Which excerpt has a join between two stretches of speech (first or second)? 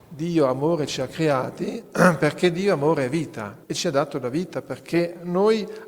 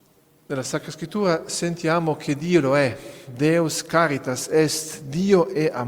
first